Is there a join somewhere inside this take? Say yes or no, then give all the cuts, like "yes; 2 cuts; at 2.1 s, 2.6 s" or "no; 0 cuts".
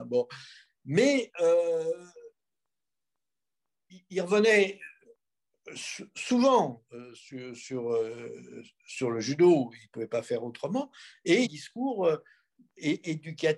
yes; 1 cut; at 11.4 s